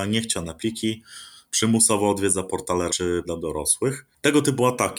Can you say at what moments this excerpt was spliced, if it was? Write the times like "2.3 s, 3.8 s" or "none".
2.9 s, 3.2 s